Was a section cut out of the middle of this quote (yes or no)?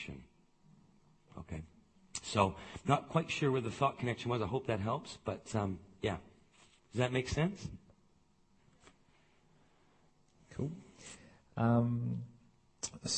no